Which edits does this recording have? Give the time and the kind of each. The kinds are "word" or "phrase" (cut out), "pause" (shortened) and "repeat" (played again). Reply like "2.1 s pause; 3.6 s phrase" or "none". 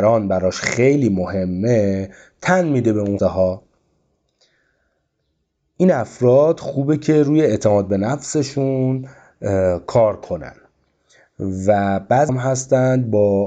3.2 s word; 12.3 s word